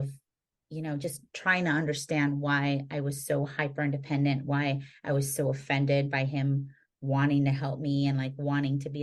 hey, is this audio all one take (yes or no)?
yes